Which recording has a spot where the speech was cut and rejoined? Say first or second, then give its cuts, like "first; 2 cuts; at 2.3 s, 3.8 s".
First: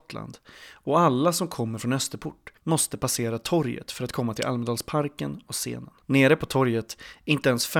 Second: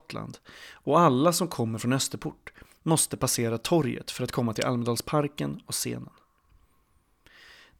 first; 2 cuts; at 2.6 s, 6.0 s